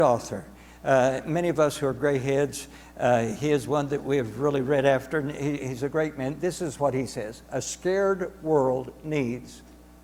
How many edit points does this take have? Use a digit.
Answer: 0